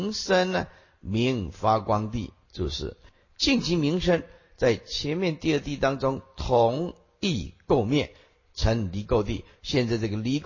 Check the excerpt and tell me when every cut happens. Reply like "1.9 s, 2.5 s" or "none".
none